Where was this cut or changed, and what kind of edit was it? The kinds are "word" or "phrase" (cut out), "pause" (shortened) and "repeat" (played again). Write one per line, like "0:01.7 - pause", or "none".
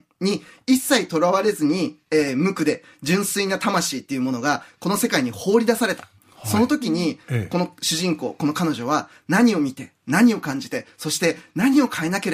none